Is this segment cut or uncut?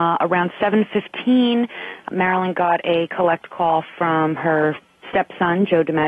cut